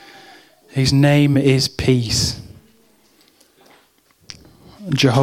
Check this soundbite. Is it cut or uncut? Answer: uncut